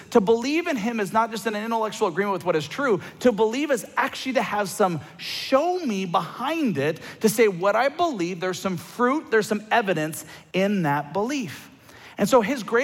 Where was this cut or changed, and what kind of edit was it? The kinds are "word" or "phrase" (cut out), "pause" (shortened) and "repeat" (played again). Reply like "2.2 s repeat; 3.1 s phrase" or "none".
none